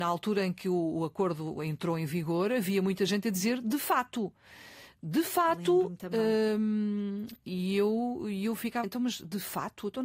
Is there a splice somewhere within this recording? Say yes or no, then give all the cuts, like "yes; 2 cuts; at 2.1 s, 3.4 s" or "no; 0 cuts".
yes; 1 cut; at 8.8 s